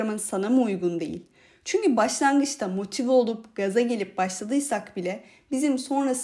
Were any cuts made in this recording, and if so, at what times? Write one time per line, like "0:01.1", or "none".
none